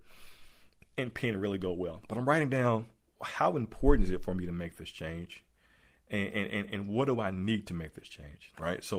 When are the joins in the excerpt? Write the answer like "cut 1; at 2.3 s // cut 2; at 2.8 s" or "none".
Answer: none